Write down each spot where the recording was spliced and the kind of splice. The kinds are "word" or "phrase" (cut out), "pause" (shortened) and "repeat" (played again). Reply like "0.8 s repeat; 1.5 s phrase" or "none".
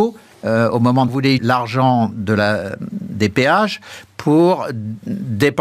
1.1 s phrase; 1.4 s word